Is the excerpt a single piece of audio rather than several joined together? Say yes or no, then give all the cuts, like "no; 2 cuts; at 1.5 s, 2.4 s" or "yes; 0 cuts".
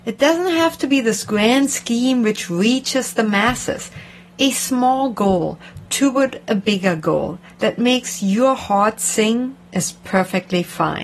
yes; 0 cuts